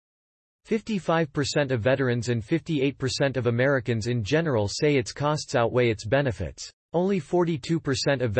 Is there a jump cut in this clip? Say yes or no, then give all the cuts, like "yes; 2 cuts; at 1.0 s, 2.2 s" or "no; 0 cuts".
yes; 1 cut; at 6.8 s